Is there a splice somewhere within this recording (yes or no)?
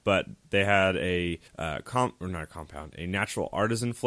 yes